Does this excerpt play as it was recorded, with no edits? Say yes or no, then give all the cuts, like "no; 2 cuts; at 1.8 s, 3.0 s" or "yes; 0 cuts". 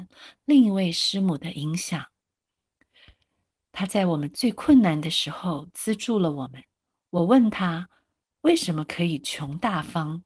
no; 1 cut; at 6.8 s